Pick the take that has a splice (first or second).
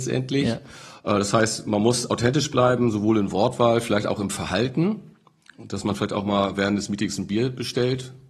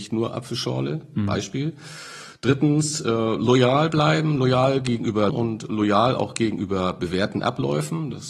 second